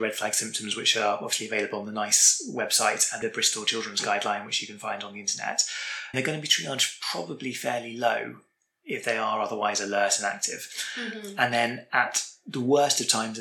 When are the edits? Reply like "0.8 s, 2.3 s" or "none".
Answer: 6.1 s